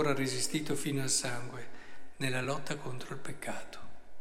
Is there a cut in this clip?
no; 0 cuts

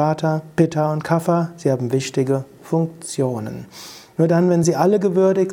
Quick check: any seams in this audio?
no; 0 cuts

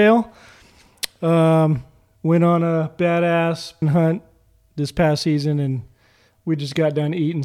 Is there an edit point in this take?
yes; 2 cuts; at 2.2 s, 3.8 s

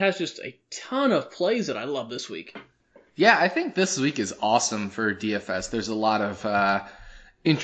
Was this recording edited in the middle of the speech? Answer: no; 0 cuts

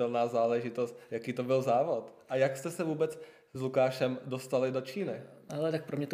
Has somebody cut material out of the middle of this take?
no; 0 cuts

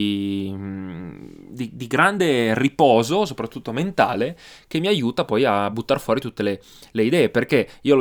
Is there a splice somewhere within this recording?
no; 0 cuts

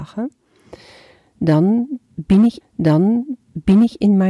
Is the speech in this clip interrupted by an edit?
yes; 1 cut; at 2.6 s

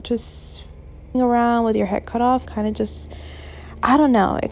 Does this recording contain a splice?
yes; 2 cuts; at 1.1 s, 2.4 s

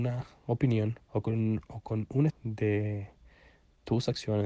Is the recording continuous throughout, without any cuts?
no; 2 cuts; at 1.0 s, 2.3 s

